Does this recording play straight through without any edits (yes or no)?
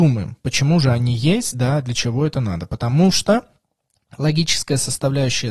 yes